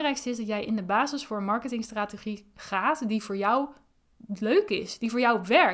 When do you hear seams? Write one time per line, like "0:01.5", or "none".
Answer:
none